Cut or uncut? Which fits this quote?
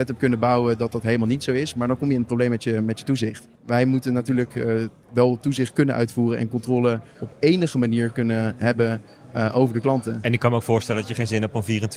cut